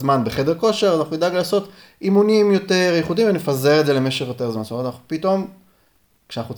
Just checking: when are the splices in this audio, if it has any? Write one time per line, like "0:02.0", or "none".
none